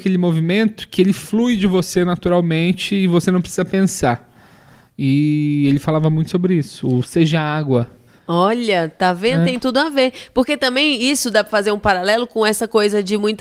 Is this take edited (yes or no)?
no